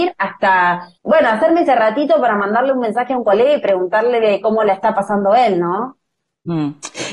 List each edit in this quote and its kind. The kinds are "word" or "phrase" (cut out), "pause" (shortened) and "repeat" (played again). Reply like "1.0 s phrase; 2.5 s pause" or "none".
1.0 s pause

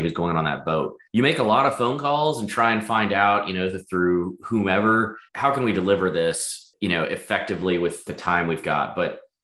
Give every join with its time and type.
1.1 s pause; 5.3 s pause

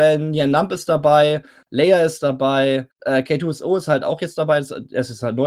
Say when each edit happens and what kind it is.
2.9 s pause

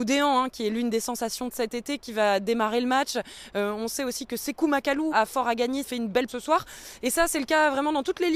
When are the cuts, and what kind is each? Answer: 5.1 s word; 5.8 s word; 6.3 s word

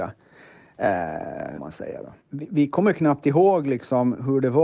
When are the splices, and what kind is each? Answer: 1.6 s phrase; 2.2 s pause

